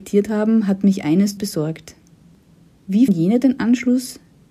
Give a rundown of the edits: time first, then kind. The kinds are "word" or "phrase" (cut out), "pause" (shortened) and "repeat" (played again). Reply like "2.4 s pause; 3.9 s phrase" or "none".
1.4 s word; 3.1 s word